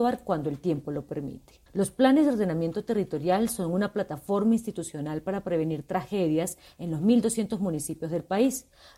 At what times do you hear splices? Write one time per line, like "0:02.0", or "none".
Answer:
0:01.7